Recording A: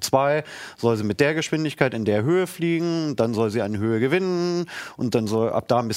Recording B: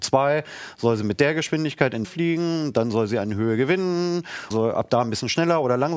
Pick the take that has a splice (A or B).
B